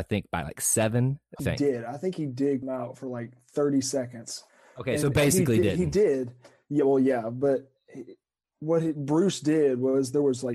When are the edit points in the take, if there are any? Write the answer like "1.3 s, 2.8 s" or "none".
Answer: 1.4 s, 2.6 s